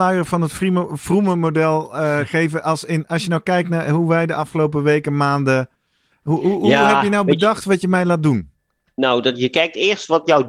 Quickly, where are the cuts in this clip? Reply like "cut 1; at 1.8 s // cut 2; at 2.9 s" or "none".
none